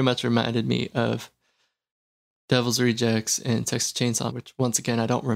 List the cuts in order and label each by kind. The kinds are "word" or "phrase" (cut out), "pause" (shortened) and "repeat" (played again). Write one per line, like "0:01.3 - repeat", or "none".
0:04.3 - word